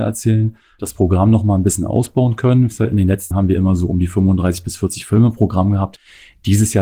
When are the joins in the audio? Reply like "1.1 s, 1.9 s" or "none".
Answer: 3.3 s